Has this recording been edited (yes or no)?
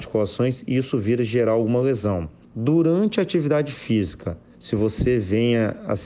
yes